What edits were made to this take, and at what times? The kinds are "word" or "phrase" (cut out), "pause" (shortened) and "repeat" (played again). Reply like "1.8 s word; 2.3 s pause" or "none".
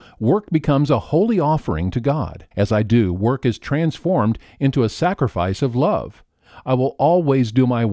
2.5 s pause